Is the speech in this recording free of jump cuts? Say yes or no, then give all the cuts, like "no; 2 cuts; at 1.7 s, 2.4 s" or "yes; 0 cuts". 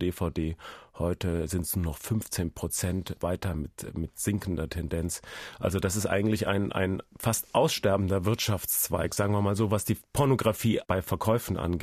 yes; 0 cuts